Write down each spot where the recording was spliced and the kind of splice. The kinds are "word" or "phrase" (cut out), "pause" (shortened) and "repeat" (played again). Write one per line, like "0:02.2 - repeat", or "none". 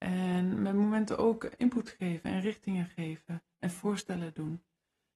none